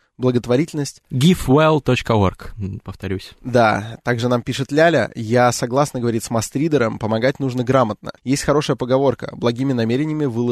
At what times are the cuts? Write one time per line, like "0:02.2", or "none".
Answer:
0:08.2